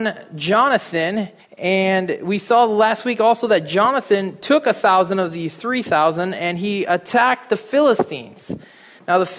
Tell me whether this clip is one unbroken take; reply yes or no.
no